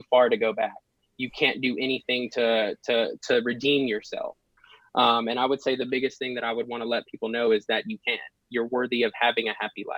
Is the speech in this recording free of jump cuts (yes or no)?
yes